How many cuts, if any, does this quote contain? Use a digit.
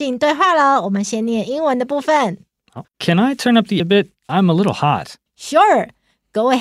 3